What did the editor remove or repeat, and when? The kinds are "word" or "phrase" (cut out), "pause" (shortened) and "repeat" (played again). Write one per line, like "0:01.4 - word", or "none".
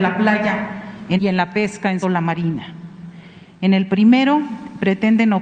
0:01.2 - word
0:02.0 - word